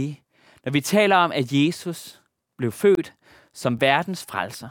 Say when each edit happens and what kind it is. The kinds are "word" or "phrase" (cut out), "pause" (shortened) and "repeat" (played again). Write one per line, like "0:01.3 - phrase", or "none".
none